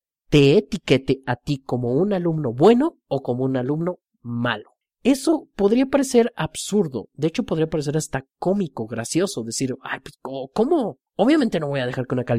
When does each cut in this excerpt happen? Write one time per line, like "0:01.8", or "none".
0:04.8
0:11.1